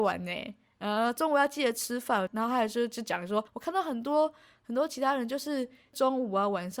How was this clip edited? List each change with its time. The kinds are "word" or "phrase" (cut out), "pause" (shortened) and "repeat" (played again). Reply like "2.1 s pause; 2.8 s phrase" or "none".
3.5 s pause